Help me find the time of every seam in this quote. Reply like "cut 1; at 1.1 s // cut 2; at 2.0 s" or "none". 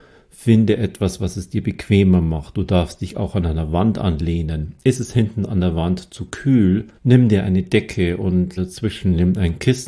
cut 1; at 7.0 s // cut 2; at 8.6 s